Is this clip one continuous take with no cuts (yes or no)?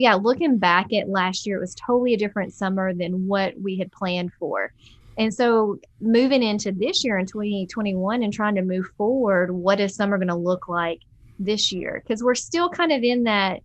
yes